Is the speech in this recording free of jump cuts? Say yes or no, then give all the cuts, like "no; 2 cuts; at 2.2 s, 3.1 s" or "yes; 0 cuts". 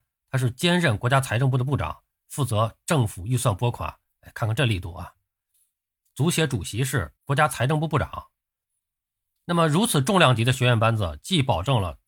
no; 1 cut; at 7.2 s